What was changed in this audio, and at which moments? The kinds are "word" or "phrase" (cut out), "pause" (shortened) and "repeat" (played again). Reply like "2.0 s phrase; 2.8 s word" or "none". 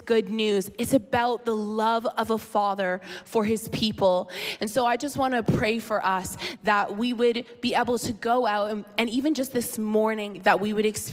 none